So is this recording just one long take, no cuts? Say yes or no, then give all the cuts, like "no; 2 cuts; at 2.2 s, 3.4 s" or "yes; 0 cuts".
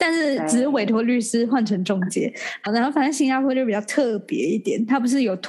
no; 1 cut; at 2.7 s